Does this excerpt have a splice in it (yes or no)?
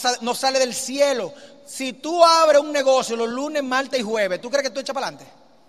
no